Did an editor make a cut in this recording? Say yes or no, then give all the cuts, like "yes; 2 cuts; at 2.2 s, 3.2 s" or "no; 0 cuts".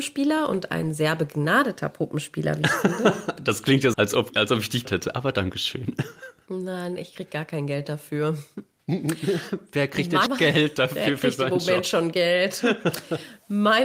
yes; 4 cuts; at 3.9 s, 4.3 s, 4.8 s, 10.3 s